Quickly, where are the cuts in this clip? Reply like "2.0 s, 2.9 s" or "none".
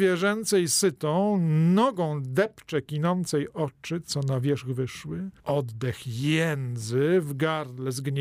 5.4 s